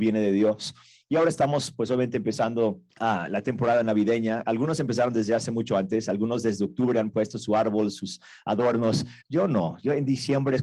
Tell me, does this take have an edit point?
yes; 2 cuts; at 2.9 s, 9.2 s

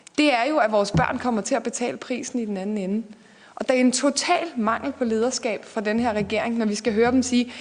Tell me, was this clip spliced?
no; 0 cuts

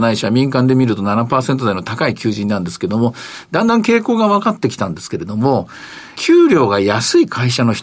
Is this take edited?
yes; 1 cut; at 6.1 s

